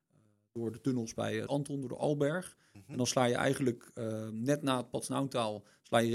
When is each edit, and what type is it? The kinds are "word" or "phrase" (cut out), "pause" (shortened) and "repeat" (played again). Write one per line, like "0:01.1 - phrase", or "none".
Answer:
0:01.5 - word